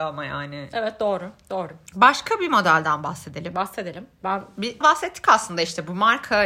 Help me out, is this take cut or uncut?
cut